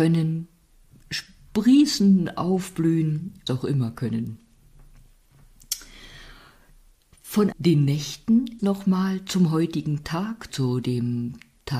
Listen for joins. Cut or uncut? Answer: cut